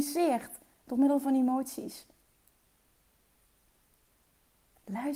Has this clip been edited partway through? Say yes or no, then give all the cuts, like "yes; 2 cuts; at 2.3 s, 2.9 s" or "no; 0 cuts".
no; 0 cuts